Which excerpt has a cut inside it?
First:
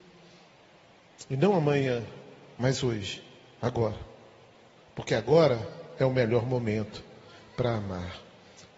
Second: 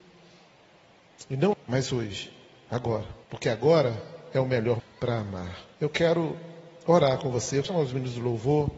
second; 5 cuts; at 1.5 s, 3.2 s, 4.8 s, 5.7 s, 7.6 s

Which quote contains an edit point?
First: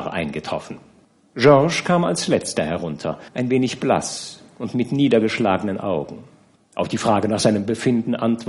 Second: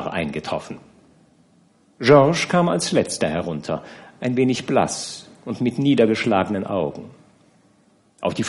first; 3 cuts; at 1.0 s, 3.3 s, 6.6 s

